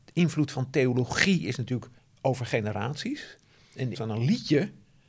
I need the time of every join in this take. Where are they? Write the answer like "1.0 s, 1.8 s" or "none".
2.0 s, 3.9 s